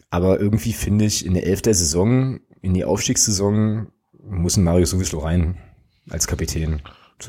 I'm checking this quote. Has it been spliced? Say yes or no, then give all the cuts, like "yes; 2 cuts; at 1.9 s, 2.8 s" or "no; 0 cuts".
no; 0 cuts